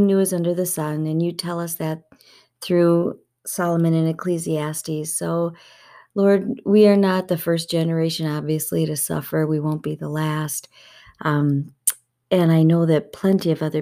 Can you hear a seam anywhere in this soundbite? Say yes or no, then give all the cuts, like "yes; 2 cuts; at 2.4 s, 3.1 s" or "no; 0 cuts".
no; 0 cuts